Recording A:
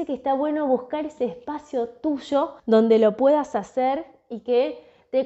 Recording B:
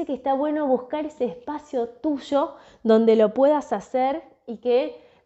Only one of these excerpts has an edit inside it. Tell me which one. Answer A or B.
A